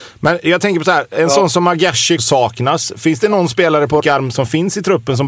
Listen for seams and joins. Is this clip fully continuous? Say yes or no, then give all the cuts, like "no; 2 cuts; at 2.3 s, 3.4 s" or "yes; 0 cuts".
no; 3 cuts; at 2.2 s, 3.2 s, 4.0 s